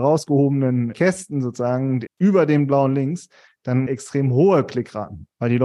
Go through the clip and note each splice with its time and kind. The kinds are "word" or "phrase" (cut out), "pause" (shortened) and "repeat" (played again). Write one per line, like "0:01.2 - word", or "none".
0:00.9 - word
0:02.1 - word
0:03.9 - phrase